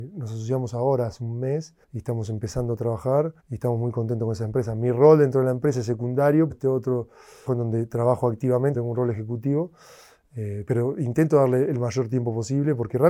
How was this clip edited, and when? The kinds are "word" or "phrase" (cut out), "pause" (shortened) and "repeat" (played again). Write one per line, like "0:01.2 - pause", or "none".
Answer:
0:01.8 - pause
0:03.4 - pause
0:06.5 - phrase
0:07.5 - word
0:08.7 - word
0:10.7 - word